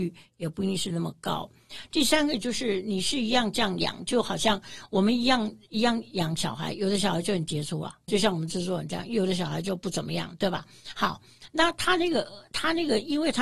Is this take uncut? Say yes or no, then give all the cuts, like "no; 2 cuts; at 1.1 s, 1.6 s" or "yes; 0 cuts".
no; 1 cut; at 8.1 s